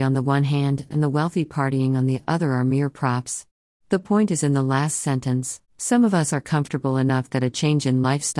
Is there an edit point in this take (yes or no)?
yes